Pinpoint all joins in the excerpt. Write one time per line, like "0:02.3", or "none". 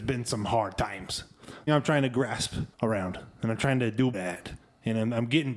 0:01.7
0:02.7
0:04.1
0:04.6